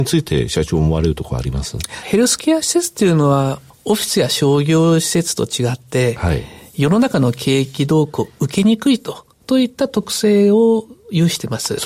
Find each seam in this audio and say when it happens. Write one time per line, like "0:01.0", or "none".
none